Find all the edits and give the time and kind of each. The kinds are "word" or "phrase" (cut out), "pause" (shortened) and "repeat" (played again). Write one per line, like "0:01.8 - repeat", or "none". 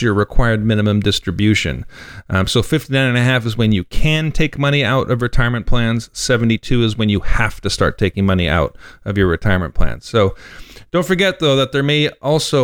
none